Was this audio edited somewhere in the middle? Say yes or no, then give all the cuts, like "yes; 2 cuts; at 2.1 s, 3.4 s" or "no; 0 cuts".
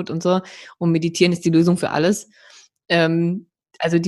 no; 0 cuts